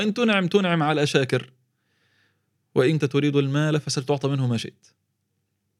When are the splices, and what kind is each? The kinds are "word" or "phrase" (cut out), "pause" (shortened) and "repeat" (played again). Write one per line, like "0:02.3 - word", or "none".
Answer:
0:03.0 - word